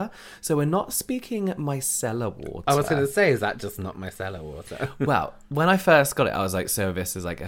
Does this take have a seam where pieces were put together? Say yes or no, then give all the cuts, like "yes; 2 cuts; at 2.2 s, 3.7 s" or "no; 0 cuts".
no; 0 cuts